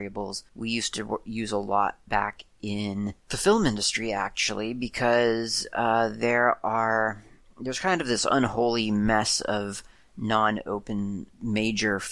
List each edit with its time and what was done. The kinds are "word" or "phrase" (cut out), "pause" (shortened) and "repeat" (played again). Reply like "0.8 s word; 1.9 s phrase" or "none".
none